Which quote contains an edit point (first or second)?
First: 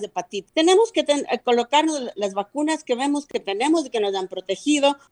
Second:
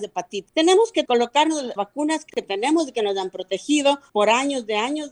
second